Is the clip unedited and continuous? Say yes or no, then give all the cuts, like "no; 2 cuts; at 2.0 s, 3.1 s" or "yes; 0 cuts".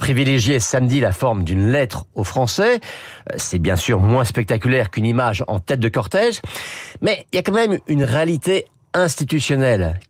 yes; 0 cuts